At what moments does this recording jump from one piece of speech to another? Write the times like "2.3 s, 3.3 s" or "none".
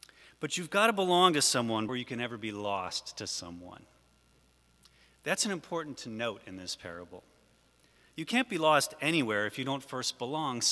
1.9 s